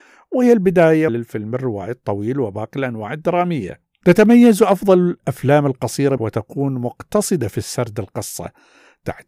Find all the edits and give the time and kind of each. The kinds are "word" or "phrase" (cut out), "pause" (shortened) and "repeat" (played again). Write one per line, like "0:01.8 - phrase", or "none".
0:01.1 - phrase
0:06.2 - phrase